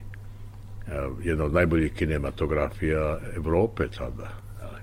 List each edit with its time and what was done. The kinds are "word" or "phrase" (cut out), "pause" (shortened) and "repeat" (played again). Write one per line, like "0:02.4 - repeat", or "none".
none